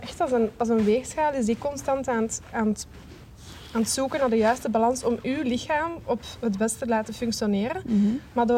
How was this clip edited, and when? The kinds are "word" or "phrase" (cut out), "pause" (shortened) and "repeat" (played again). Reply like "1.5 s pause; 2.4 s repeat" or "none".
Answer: none